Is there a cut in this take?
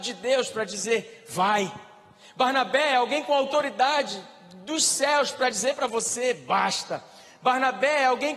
no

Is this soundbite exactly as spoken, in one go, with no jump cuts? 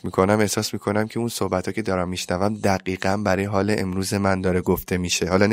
yes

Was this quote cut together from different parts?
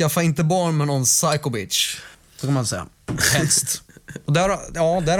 yes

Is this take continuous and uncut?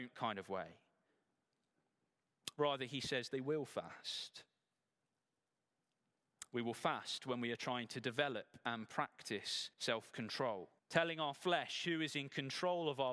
no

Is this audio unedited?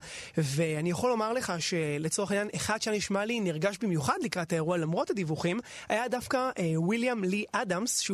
yes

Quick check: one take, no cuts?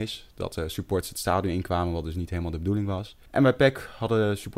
no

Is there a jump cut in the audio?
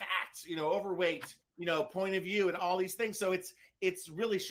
no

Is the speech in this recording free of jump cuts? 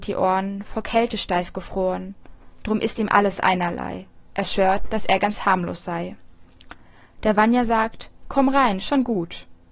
yes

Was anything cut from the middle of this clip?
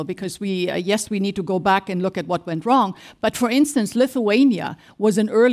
no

